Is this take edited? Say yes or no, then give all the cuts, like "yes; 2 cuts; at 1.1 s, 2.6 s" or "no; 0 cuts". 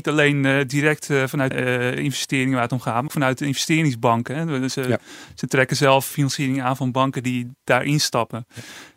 yes; 3 cuts; at 1.5 s, 3.1 s, 6.1 s